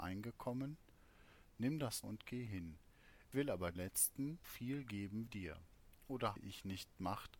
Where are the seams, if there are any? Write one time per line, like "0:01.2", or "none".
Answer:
0:02.0
0:03.3
0:03.8
0:04.4
0:05.3
0:06.4